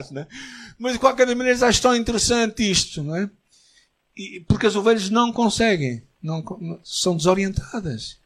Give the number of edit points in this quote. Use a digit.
0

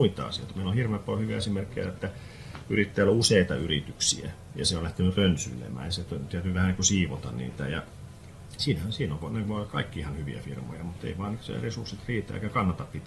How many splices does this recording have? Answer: 1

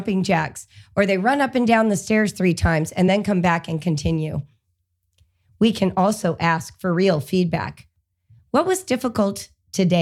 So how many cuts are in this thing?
0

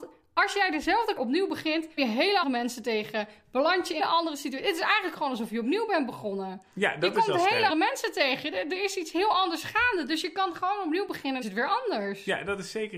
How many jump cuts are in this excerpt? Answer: 6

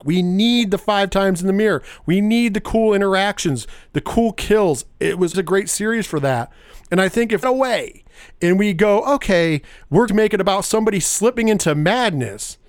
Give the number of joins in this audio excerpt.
3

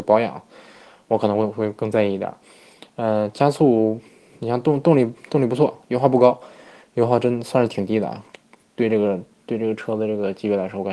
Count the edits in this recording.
0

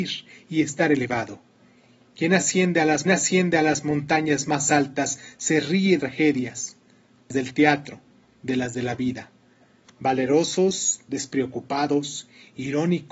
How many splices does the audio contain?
3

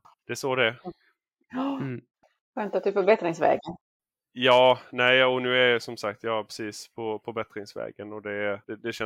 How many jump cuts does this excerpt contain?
0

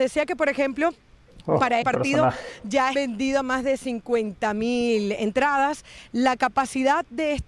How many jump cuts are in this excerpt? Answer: 2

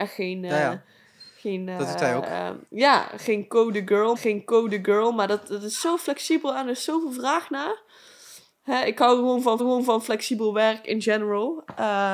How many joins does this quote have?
3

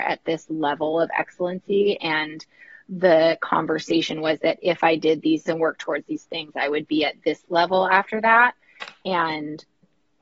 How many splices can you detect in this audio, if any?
1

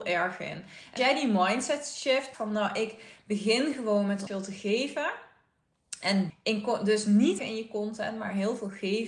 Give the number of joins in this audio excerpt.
5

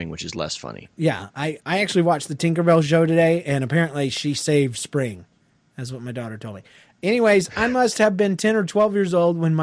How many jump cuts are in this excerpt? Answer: 1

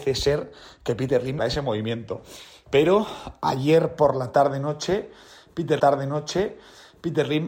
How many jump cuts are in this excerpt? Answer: 2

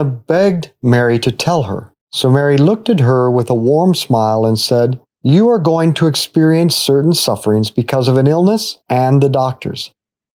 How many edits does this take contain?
3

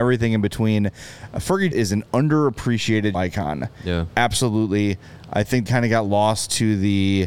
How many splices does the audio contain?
3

